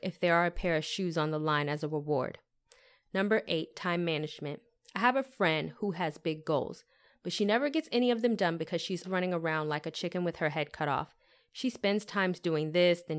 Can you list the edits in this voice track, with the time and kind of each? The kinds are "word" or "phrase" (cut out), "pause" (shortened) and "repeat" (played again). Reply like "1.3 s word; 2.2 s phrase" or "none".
9.0 s word